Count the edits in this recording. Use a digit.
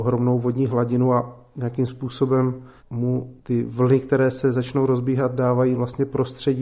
0